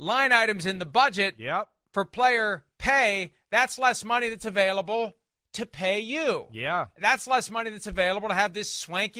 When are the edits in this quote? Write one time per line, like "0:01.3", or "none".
none